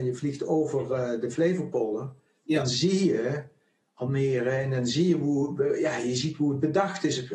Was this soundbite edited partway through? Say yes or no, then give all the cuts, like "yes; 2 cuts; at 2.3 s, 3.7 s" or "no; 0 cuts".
no; 0 cuts